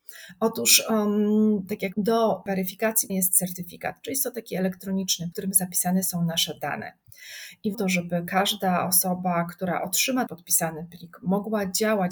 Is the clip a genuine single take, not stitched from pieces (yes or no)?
no